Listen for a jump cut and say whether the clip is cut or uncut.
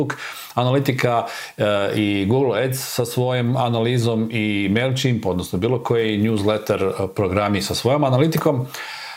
uncut